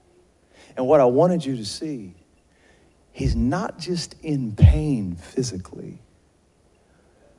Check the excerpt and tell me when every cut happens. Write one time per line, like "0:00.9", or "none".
none